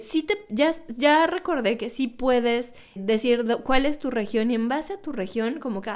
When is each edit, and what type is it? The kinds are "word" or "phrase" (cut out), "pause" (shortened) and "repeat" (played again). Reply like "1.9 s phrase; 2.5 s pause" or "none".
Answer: 3.0 s word